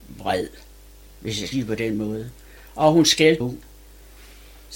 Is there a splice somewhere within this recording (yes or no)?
yes